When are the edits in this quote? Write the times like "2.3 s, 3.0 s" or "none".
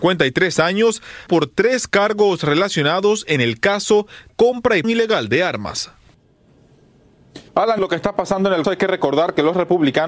1.3 s, 4.3 s, 4.8 s, 7.5 s, 7.8 s, 8.6 s